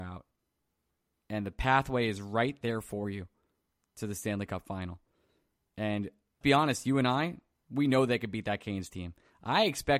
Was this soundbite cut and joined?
yes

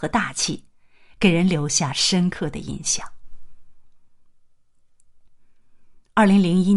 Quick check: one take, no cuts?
yes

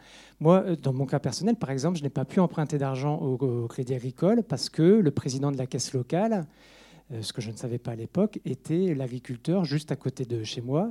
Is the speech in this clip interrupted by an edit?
no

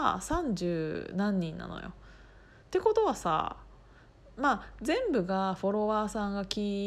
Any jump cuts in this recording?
no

